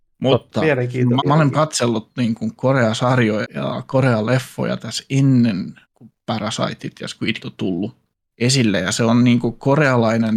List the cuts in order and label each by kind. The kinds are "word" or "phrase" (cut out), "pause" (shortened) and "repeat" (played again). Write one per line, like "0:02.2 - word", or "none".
0:01.2 - word
0:01.5 - word
0:03.4 - word
0:05.8 - pause
0:07.4 - word
0:08.1 - pause